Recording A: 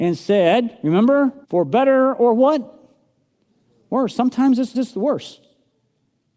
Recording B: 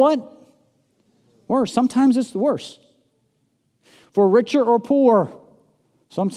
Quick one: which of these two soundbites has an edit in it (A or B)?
A